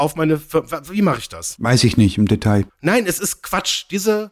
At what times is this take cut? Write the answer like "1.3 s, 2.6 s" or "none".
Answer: none